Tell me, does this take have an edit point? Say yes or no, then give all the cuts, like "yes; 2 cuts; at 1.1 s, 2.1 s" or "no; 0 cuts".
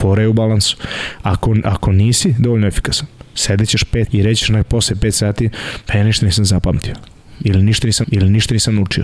yes; 2 cuts; at 4.1 s, 8.0 s